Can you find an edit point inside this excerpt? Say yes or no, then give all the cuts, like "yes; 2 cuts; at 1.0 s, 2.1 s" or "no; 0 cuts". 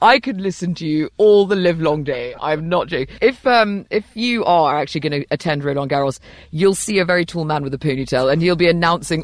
no; 0 cuts